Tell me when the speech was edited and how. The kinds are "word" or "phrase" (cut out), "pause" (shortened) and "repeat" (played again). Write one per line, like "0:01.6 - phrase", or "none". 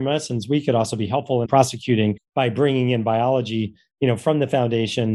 0:01.5 - word